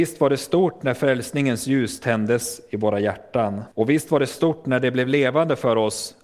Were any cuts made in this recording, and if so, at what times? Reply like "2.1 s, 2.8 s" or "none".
3.7 s